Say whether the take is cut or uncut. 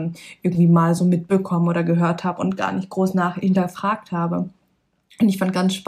uncut